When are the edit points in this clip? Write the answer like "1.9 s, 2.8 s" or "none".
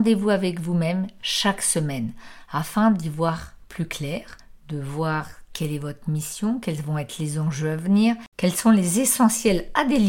3.6 s, 8.3 s